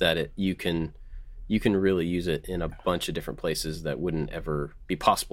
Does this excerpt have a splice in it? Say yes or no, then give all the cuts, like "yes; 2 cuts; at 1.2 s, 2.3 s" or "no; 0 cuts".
no; 0 cuts